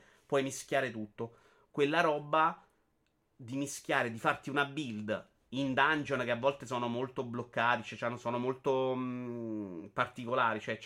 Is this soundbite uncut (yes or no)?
yes